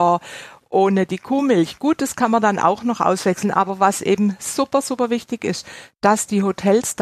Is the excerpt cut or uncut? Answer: uncut